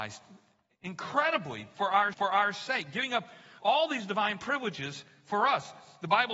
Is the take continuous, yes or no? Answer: no